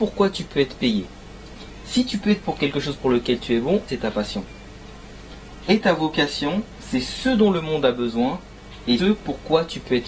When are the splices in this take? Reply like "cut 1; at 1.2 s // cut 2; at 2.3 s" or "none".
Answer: cut 1; at 2.4 s // cut 2; at 3.9 s // cut 3; at 9.0 s